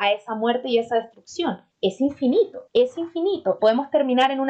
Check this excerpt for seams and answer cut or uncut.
cut